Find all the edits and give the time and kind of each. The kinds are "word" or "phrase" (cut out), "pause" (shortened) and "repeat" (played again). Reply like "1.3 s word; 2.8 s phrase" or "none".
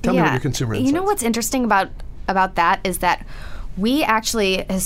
none